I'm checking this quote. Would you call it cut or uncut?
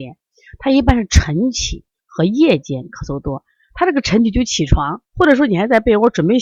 cut